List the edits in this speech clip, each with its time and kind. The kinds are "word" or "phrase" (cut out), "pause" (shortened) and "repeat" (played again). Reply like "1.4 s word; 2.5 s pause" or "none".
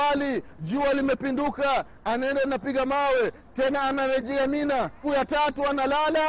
5.0 s word